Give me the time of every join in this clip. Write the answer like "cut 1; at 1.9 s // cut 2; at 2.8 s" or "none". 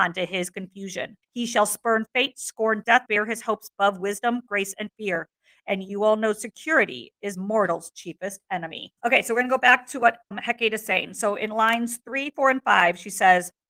cut 1; at 1.2 s // cut 2; at 3.1 s // cut 3; at 9.0 s // cut 4; at 10.3 s